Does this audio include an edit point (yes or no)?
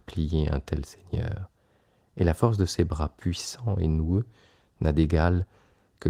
no